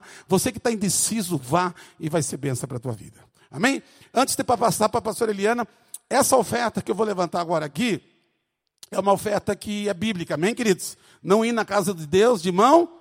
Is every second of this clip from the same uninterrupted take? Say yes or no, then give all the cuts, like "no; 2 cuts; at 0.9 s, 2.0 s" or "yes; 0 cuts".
yes; 0 cuts